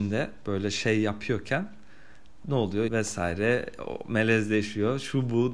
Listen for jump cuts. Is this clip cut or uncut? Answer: cut